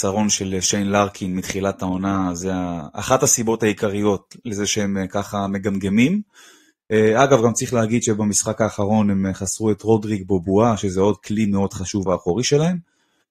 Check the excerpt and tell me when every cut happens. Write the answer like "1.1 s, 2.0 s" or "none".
12.1 s